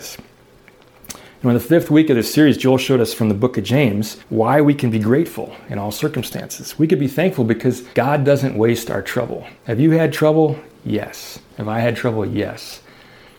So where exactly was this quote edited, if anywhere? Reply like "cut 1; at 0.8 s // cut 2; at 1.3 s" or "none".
cut 1; at 4.2 s // cut 2; at 7.9 s // cut 3; at 9.6 s // cut 4; at 11.4 s